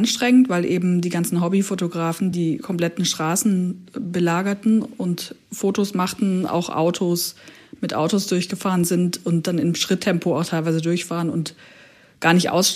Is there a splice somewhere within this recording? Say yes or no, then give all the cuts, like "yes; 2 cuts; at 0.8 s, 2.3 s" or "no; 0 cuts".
no; 0 cuts